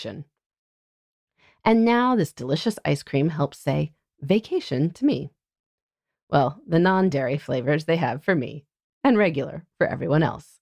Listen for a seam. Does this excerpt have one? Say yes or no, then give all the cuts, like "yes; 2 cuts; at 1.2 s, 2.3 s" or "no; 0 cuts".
no; 0 cuts